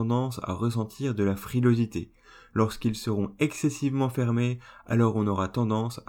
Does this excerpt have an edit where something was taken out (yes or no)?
no